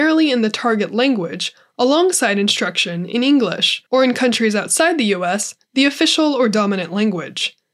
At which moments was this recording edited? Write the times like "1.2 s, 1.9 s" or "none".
3.9 s